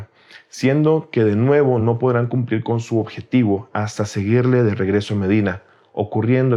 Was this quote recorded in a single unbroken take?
yes; 0 cuts

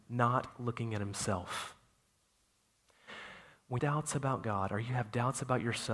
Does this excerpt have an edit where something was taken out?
yes; 1 cut; at 3.8 s

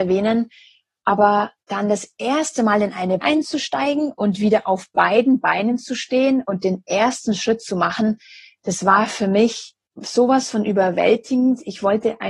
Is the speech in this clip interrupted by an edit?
yes; 3 cuts; at 1.6 s, 3.2 s, 9.9 s

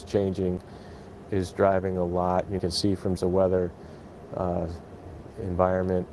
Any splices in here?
yes; 3 cuts; at 1.2 s, 2.6 s, 3.2 s

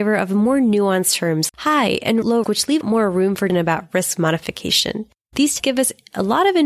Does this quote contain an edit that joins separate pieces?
yes; 5 cuts; at 1.5 s, 2.4 s, 2.8 s, 3.5 s, 5.6 s

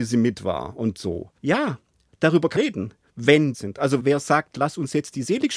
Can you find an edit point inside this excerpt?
yes; 4 cuts; at 1.4 s, 2.6 s, 3.5 s, 4.0 s

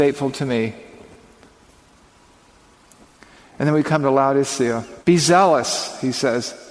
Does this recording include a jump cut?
yes; 1 cut; at 5.0 s

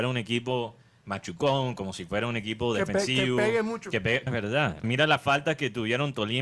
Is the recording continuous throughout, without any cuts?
no; 2 cuts; at 4.3 s, 4.8 s

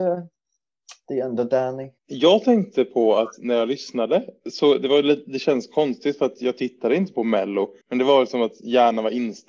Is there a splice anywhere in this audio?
yes; 3 cuts; at 2.0 s, 4.4 s, 7.8 s

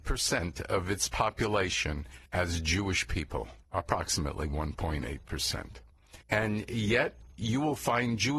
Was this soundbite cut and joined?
yes; 3 cuts; at 2.3 s, 3.6 s, 6.2 s

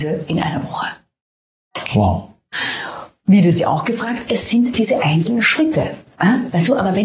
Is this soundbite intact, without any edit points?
no; 2 cuts; at 3.6 s, 4.7 s

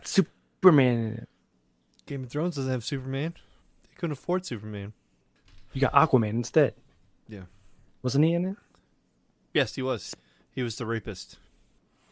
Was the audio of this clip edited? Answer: no; 0 cuts

